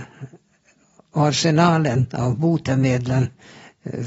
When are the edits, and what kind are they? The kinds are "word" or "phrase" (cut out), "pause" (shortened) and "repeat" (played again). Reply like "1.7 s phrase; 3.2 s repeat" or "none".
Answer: none